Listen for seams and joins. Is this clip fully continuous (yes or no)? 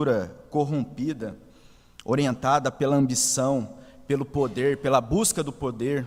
yes